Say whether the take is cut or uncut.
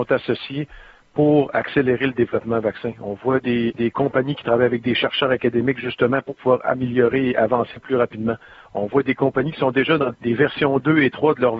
cut